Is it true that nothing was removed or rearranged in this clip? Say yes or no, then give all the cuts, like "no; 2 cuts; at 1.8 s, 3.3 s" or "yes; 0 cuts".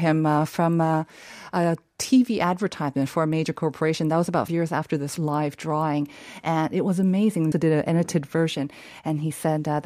no; 3 cuts; at 4.5 s, 5.2 s, 7.5 s